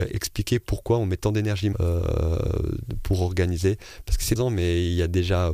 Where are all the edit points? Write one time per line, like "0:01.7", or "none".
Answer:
0:01.7
0:04.4